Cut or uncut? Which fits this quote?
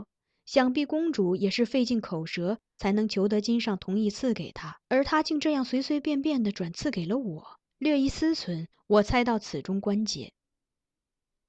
cut